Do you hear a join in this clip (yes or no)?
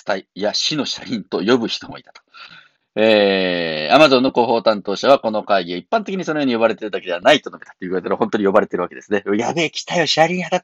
no